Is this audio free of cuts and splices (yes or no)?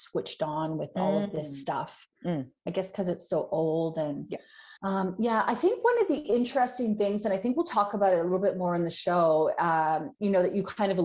no